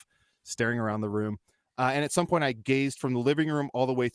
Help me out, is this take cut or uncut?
uncut